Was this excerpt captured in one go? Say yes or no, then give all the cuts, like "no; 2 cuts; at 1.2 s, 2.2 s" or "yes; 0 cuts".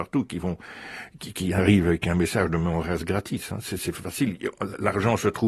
yes; 0 cuts